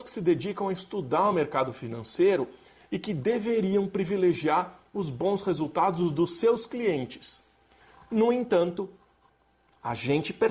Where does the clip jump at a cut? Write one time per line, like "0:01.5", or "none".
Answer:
none